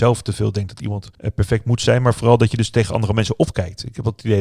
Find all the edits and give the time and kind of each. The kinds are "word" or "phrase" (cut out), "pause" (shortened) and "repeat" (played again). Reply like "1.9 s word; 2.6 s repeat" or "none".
none